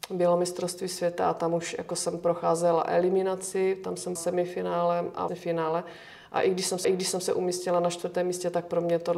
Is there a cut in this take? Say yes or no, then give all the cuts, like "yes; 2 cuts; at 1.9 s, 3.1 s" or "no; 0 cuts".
yes; 3 cuts; at 4.2 s, 5.3 s, 6.8 s